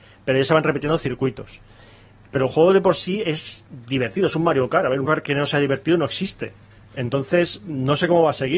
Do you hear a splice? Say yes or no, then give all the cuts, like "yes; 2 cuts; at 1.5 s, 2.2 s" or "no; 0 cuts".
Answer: yes; 2 cuts; at 5.0 s, 6.7 s